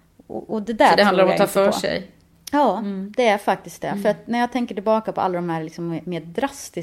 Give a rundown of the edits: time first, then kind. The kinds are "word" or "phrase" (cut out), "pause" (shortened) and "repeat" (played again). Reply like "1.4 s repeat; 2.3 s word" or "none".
none